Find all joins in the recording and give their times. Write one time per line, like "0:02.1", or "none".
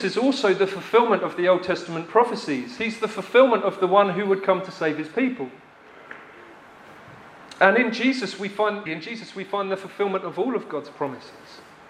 0:08.9